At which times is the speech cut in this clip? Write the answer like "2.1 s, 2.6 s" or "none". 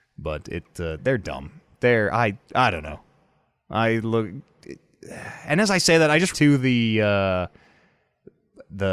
1.0 s, 2.4 s, 6.3 s